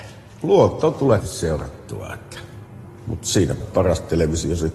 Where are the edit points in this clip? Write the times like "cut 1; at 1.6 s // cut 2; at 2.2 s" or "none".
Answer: cut 1; at 1.2 s // cut 2; at 3.6 s